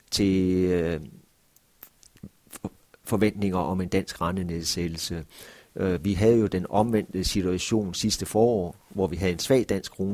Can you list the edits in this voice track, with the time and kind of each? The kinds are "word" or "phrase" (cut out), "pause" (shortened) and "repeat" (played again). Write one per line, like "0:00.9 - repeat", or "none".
none